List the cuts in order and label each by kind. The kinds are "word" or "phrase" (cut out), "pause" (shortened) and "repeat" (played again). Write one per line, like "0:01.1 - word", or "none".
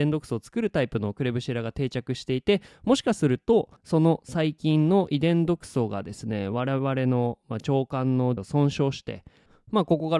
0:03.8 - pause
0:08.4 - word